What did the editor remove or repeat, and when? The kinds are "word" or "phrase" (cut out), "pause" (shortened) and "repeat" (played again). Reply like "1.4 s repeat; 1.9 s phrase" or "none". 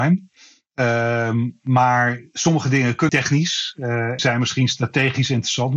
3.1 s word; 4.2 s word